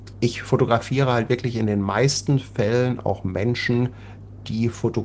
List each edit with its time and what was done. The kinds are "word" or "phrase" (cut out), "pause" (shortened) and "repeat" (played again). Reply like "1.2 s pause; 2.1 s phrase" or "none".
none